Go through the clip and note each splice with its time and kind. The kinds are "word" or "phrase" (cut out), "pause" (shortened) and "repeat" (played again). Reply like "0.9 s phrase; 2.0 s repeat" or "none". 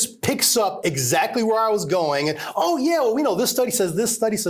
none